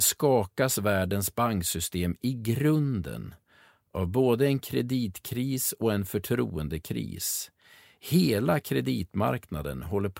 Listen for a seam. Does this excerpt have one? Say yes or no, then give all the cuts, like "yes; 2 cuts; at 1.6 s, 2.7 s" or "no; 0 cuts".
no; 0 cuts